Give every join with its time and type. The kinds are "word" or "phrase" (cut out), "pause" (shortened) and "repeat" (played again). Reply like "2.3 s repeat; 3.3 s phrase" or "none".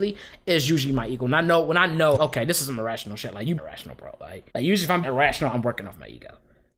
2.2 s word; 3.6 s word; 4.5 s pause; 5.0 s word